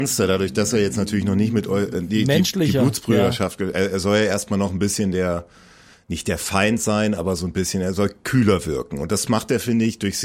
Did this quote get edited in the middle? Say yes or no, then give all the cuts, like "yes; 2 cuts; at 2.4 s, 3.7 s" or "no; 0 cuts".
no; 0 cuts